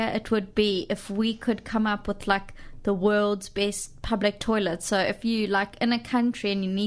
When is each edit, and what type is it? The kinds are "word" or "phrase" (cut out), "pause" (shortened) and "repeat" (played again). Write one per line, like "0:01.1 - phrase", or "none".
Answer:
none

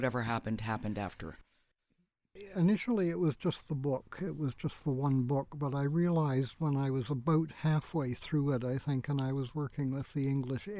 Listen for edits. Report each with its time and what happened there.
none

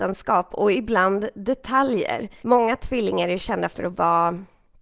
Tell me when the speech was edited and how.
0:02.4 - pause

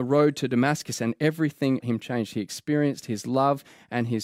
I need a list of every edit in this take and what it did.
0:01.8 - word

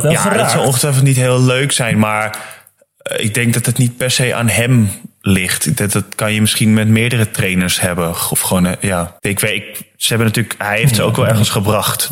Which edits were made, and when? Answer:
0:09.2 - pause

